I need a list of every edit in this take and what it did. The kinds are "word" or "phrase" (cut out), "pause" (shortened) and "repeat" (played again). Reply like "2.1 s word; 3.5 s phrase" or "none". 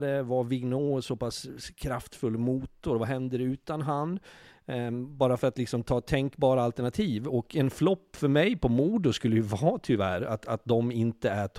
none